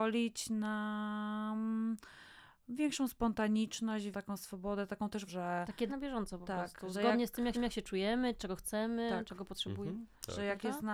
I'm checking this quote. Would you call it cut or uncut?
cut